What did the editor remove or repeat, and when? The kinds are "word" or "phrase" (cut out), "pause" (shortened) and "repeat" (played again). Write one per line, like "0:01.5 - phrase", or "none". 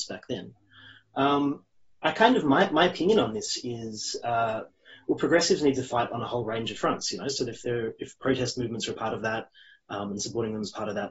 none